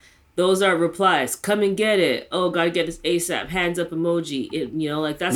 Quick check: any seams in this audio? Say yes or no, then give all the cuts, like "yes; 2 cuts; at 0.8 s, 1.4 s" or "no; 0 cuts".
no; 0 cuts